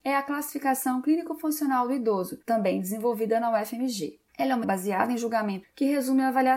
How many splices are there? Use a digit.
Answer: 4